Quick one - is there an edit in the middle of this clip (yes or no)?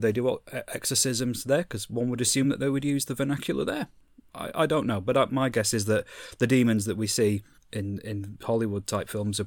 no